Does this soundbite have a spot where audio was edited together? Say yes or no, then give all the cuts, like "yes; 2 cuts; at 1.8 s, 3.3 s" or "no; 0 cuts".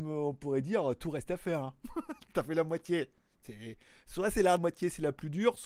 yes; 1 cut; at 4.6 s